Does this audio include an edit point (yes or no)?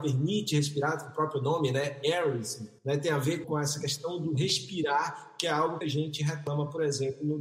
yes